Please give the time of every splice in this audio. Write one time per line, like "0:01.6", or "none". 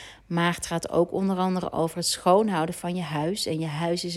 none